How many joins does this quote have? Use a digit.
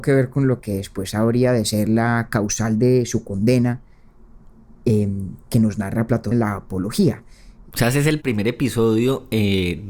1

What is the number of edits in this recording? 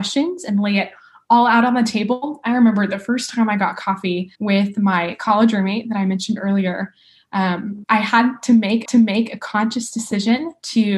3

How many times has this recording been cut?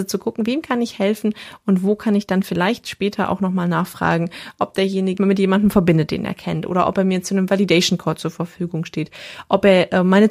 1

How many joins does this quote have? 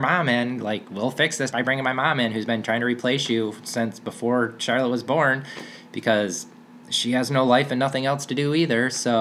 2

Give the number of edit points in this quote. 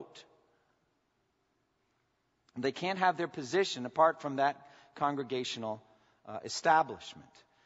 0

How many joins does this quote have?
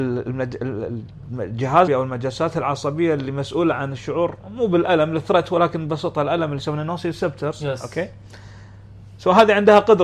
1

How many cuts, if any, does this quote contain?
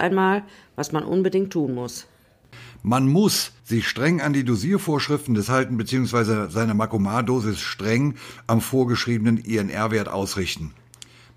2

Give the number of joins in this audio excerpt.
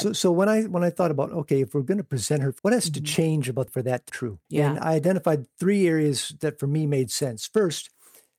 4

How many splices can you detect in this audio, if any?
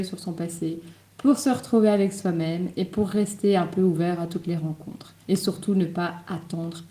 1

